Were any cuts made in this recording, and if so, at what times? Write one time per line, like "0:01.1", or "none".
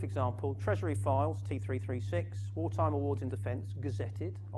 0:03.3